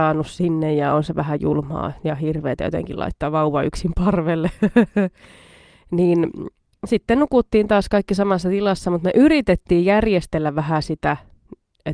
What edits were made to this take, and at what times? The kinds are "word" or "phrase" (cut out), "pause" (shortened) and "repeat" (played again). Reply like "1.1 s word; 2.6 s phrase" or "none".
none